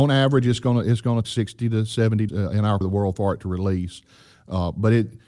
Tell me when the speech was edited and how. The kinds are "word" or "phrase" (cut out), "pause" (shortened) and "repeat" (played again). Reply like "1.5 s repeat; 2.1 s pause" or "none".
1.2 s word; 2.3 s word; 2.8 s word